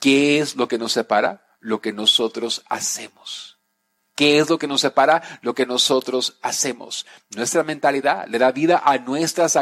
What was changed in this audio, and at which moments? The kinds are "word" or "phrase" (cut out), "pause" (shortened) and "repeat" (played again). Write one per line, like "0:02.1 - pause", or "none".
none